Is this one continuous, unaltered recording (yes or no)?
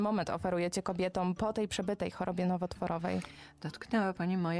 yes